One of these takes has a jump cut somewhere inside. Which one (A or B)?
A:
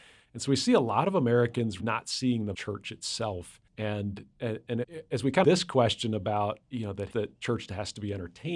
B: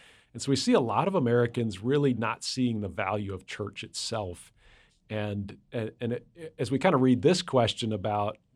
A